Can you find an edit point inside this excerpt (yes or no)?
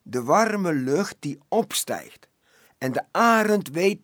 no